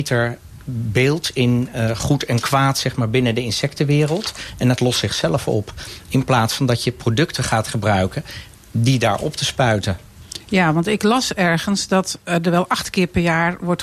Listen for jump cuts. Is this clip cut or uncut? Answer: uncut